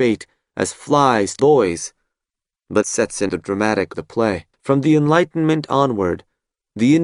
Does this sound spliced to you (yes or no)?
yes